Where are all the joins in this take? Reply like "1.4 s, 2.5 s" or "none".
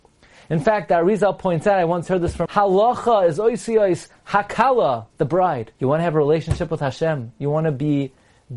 2.5 s, 5.1 s, 5.7 s